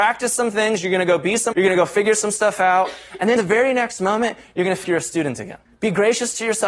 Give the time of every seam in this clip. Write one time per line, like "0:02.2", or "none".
0:01.5
0:03.4
0:04.8
0:05.7